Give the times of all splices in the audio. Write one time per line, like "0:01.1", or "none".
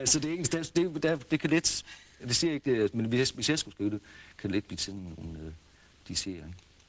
none